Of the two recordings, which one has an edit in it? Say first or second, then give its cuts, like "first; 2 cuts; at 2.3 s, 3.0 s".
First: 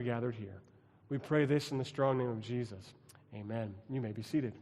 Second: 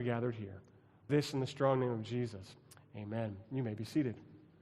second; 1 cut; at 1.1 s